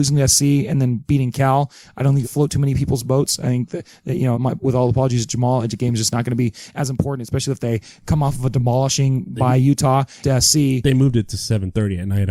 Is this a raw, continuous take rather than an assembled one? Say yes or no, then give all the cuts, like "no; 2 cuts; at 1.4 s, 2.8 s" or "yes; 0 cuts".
no; 3 cuts; at 2.2 s, 4.3 s, 10.2 s